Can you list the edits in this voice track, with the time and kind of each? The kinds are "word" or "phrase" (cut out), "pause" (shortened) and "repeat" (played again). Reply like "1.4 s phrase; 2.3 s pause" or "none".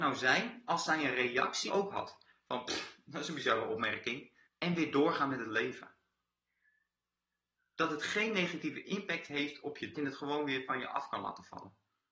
1.7 s phrase; 4.5 s pause; 9.9 s phrase